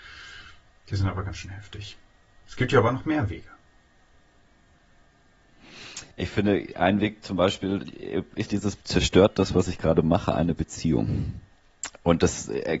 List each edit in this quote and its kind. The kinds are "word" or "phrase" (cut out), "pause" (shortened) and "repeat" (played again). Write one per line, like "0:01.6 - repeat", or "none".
0:02.3 - pause
0:06.1 - pause
0:08.5 - word
0:08.8 - pause